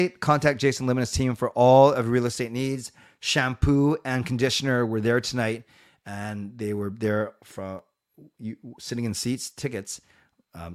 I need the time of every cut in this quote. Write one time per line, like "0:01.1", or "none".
none